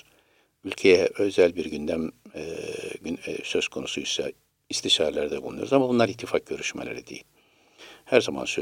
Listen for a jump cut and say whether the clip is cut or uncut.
uncut